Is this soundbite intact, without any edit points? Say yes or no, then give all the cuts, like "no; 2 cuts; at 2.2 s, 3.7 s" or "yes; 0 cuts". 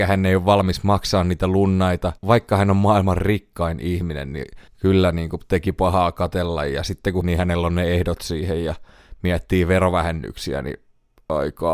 no; 2 cuts; at 4.7 s, 7.2 s